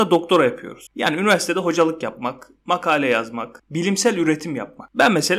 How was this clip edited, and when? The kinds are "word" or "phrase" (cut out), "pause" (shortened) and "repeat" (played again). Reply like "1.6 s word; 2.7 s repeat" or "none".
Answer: none